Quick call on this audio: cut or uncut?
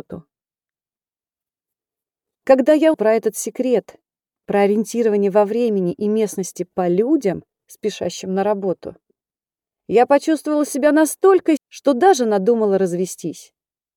cut